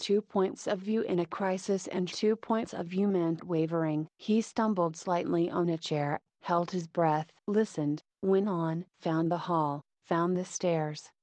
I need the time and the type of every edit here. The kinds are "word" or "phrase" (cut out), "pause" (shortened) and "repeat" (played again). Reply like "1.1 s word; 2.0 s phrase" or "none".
7.4 s pause; 8.9 s pause